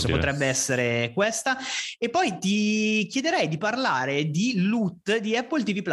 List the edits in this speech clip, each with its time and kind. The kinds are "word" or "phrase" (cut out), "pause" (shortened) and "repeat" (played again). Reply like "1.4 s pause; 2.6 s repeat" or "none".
none

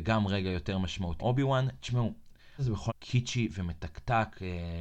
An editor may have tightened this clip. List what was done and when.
1.2 s word; 2.6 s word; 2.9 s word

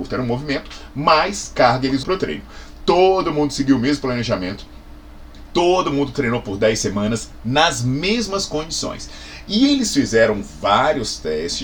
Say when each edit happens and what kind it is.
2.0 s word

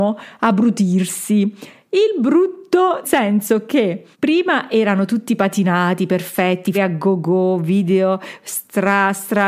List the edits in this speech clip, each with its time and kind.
3.0 s word; 4.1 s pause; 6.7 s word

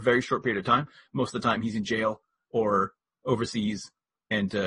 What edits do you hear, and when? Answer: none

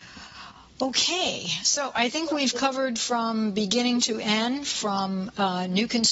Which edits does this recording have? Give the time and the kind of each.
none

